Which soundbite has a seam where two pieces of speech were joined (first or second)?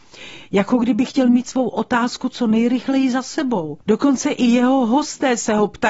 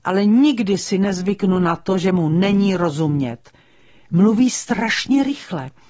first